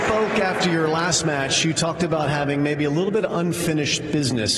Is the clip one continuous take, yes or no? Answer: yes